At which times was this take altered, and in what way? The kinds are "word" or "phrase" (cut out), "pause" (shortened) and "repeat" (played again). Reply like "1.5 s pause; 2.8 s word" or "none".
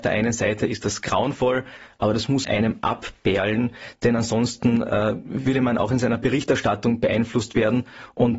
2.4 s word